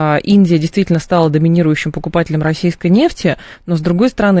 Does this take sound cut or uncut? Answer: uncut